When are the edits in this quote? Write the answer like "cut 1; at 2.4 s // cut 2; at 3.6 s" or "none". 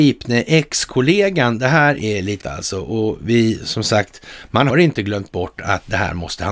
cut 1; at 2.4 s // cut 2; at 4.7 s